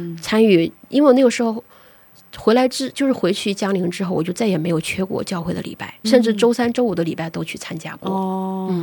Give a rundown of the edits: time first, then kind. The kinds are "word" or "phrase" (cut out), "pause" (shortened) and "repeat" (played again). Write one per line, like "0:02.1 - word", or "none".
0:06.0 - word